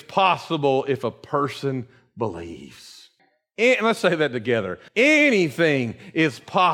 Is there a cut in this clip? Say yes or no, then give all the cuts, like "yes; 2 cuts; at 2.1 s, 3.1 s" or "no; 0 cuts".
yes; 2 cuts; at 3.2 s, 4.9 s